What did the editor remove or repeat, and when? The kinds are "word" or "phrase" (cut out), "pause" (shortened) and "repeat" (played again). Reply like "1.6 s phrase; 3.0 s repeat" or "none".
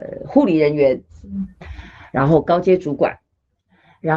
none

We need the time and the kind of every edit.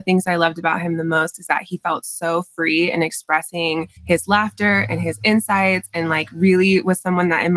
4.0 s pause

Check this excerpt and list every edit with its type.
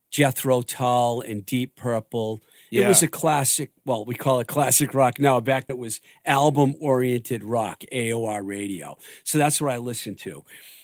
5.7 s word

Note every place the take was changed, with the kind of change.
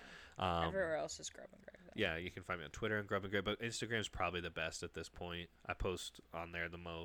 5.6 s pause

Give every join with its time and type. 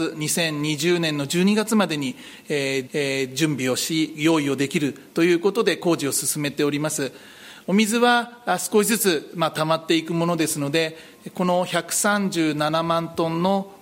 2.9 s repeat

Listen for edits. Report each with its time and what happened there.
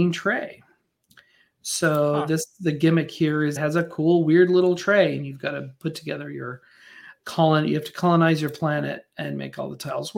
3.6 s word; 7.2 s word

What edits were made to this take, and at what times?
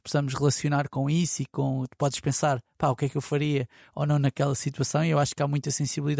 none

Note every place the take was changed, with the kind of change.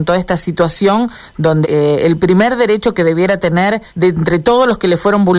1.6 s word; 3.9 s pause

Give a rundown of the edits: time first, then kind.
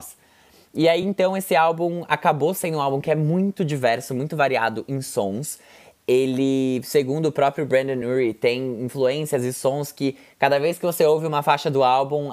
none

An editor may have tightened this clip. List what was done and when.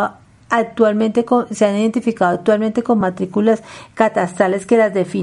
none

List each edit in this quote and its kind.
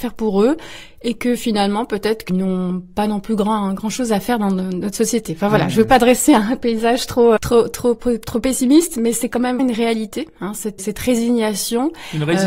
2.3 s word; 7.4 s word; 9.6 s word; 10.8 s word

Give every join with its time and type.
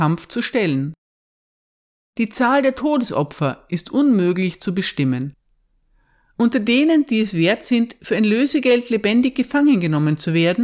none

